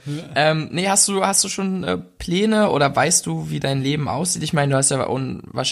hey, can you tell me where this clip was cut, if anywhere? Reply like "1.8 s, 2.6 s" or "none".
none

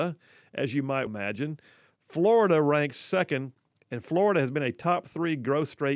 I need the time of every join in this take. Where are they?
1.1 s

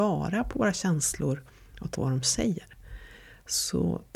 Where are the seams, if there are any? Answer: 2.0 s

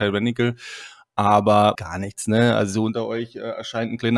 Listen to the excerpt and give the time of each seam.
1.7 s

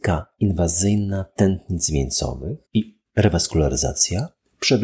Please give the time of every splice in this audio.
2.7 s

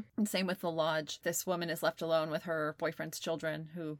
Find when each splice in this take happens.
1.2 s

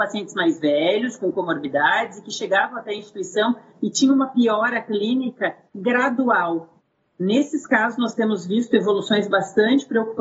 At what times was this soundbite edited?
none

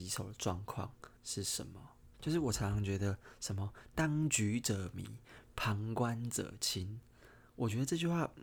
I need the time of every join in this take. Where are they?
1.2 s, 2.1 s

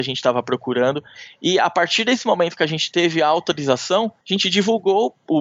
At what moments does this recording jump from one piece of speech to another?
4.2 s

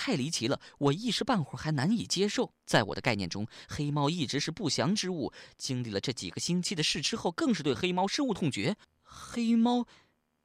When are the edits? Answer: 2.6 s, 8.8 s

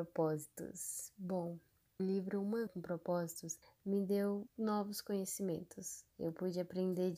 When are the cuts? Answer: 2.0 s, 2.7 s, 3.6 s, 4.5 s, 6.1 s

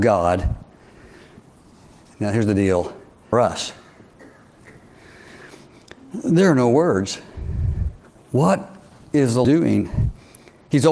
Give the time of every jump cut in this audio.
3.3 s, 8.0 s, 9.4 s

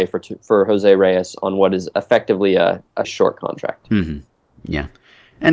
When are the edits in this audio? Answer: 3.0 s

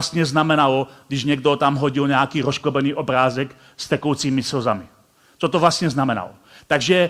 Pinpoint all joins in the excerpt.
none

